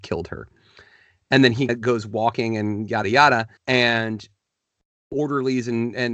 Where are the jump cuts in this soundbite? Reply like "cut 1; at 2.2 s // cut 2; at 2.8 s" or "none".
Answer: cut 1; at 1.7 s // cut 2; at 3.0 s // cut 3; at 3.6 s